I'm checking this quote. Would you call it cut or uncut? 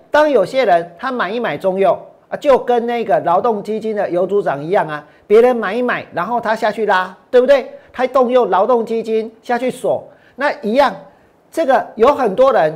uncut